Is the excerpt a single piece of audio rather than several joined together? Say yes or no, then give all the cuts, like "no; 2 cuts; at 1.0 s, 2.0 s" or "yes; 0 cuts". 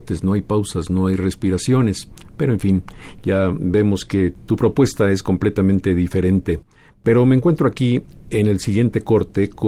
yes; 0 cuts